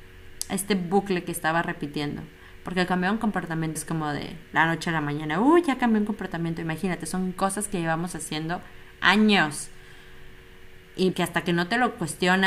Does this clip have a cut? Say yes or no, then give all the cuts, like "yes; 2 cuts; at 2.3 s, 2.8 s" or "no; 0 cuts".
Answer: yes; 2 cuts; at 3.8 s, 11.1 s